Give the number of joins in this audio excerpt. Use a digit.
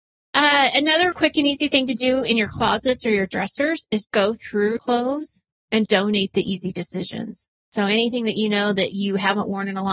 4